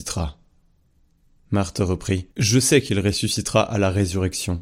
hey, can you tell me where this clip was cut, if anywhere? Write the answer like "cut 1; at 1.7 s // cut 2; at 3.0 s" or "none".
cut 1; at 2.3 s